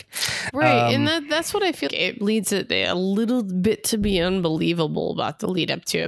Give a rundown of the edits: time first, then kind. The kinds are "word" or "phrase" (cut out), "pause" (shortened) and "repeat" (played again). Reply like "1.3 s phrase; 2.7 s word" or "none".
1.9 s word